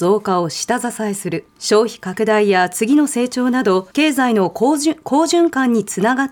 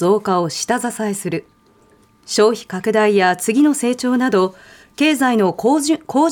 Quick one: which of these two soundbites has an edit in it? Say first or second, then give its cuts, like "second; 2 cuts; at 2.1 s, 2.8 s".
first; 2 cuts; at 1.5 s, 3.9 s